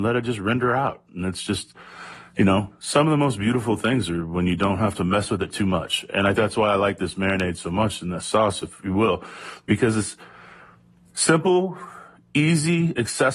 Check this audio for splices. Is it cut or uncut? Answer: cut